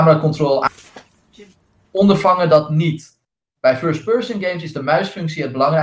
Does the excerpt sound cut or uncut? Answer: uncut